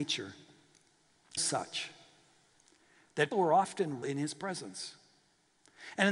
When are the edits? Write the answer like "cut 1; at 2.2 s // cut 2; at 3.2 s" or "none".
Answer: cut 1; at 1.4 s // cut 2; at 3.3 s // cut 3; at 4.0 s